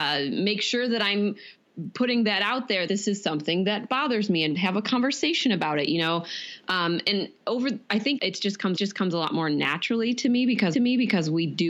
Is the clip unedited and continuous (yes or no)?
no